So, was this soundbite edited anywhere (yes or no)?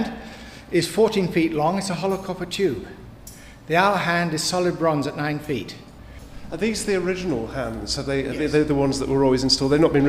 no